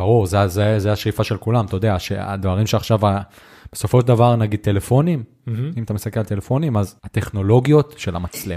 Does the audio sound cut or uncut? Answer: cut